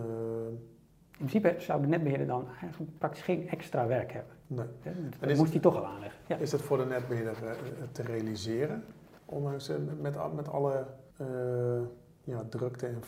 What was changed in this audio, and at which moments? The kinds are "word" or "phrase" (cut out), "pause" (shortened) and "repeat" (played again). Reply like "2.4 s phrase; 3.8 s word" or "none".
4.4 s pause; 11.1 s pause